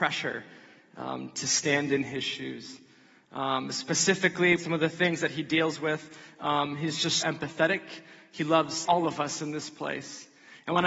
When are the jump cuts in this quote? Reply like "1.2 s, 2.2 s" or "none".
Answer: 4.6 s, 7.2 s, 8.9 s